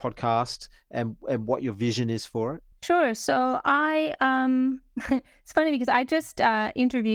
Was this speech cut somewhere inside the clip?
yes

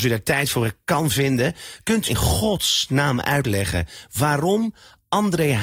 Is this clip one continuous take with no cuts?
no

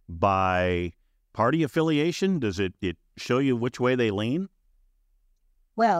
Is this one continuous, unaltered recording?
yes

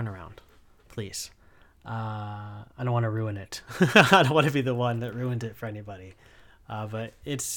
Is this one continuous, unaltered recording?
yes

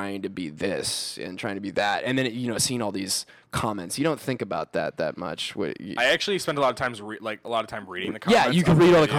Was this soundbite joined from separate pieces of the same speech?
no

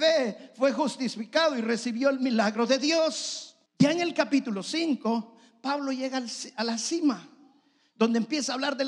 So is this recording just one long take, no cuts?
no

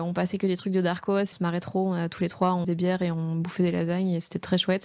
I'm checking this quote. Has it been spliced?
yes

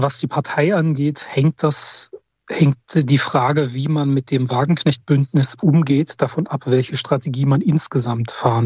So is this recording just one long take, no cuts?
yes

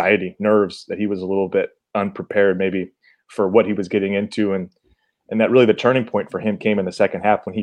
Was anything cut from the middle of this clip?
no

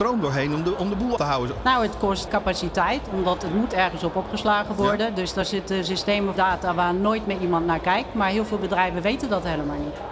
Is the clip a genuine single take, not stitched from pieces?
no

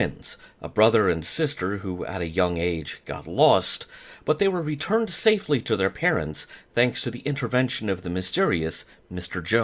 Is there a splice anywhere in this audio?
no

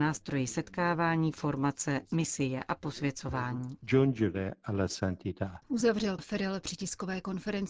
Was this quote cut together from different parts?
yes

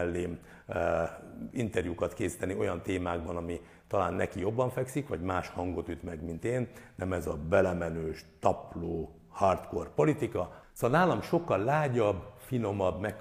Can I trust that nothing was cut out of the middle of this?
yes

